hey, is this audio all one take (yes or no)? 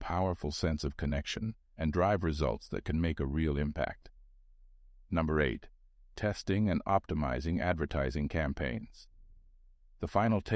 yes